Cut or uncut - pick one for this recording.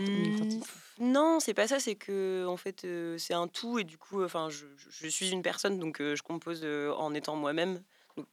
uncut